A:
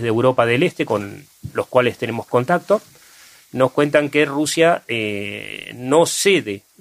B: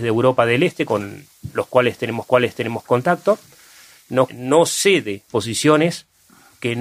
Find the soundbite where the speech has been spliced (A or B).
B